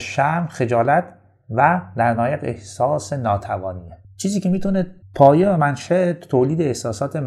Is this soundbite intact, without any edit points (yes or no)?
yes